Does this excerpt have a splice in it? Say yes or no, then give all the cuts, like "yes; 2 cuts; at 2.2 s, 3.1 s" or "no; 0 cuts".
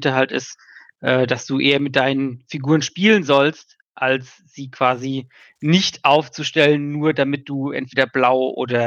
no; 0 cuts